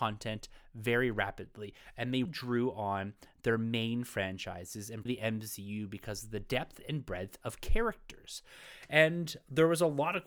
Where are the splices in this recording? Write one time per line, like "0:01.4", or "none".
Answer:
0:02.3
0:05.1